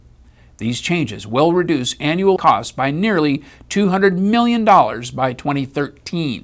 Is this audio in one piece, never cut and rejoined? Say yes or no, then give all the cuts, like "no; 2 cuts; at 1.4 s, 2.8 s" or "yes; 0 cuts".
no; 1 cut; at 2.4 s